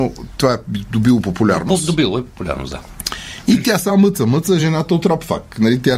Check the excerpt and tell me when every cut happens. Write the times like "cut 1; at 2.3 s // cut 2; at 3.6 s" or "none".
none